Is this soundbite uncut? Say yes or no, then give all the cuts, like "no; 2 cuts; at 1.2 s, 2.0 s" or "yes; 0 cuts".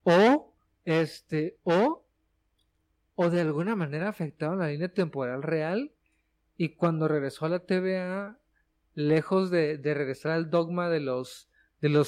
yes; 0 cuts